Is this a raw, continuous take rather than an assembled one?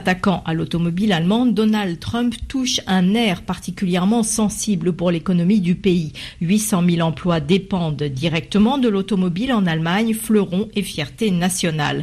yes; 0 cuts

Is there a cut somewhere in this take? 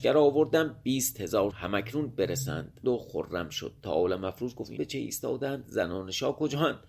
yes; 3 cuts; at 1.5 s, 2.8 s, 4.8 s

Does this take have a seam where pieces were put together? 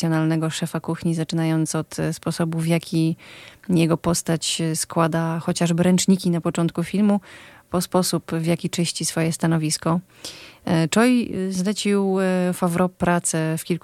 no; 0 cuts

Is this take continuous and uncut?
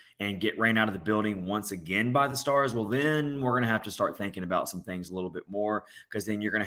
yes; 0 cuts

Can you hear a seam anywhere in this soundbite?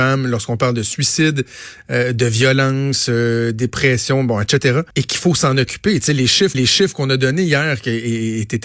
yes; 2 cuts; at 4.9 s, 6.5 s

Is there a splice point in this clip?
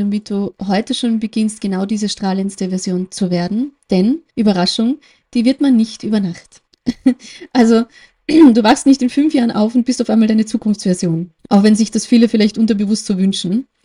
yes; 3 cuts; at 4.3 s, 6.7 s, 11.4 s

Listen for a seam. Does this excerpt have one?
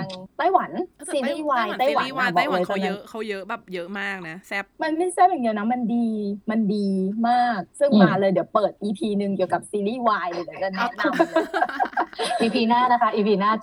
yes; 2 cuts; at 4.7 s, 7.7 s

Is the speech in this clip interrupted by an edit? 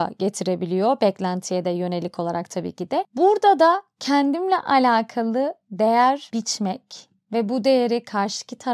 no; 0 cuts

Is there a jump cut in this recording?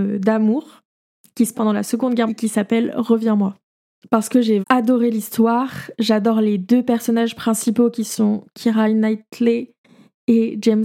yes; 3 cuts; at 1.5 s, 2.3 s, 4.6 s

